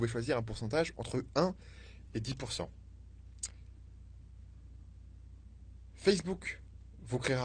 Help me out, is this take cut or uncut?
uncut